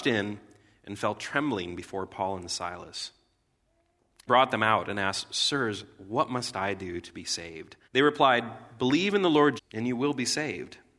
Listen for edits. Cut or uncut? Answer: cut